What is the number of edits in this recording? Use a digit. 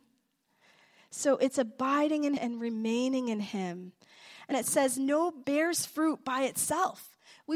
3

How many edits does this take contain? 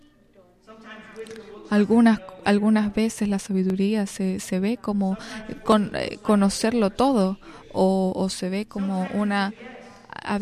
0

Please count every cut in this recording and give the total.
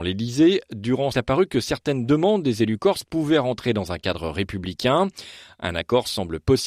1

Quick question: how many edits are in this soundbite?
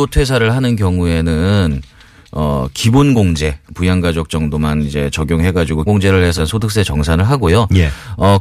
2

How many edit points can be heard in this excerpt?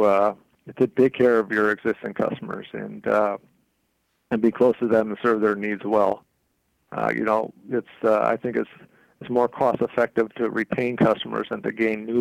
0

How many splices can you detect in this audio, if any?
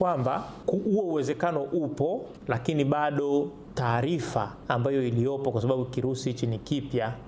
0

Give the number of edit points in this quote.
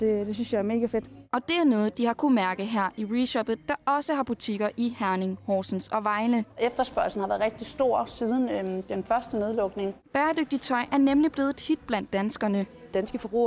1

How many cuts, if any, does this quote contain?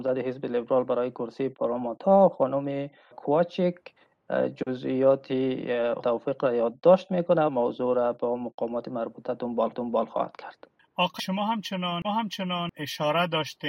6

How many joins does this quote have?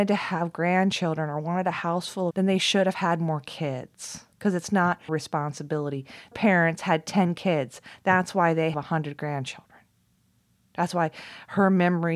5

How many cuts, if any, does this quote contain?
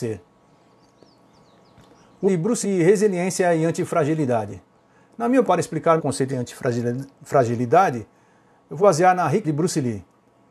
7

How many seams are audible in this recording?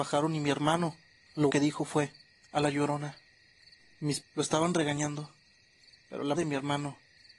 4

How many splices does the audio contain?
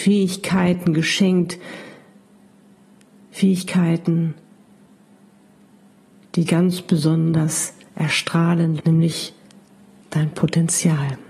2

